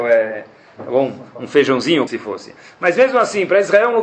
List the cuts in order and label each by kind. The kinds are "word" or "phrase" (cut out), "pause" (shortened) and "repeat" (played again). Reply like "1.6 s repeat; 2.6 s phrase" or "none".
2.1 s word